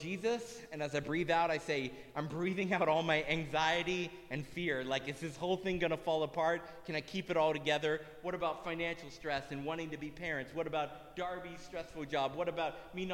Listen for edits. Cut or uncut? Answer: uncut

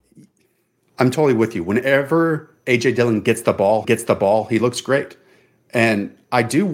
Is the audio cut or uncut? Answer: cut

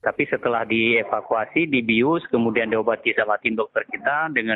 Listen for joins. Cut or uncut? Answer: uncut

